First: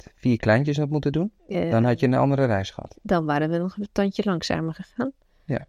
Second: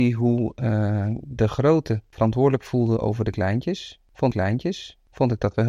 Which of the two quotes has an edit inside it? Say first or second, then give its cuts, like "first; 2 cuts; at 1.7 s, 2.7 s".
second; 2 cuts; at 2.1 s, 4.3 s